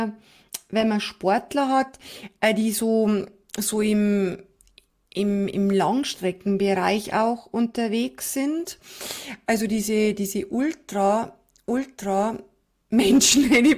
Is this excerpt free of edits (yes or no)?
yes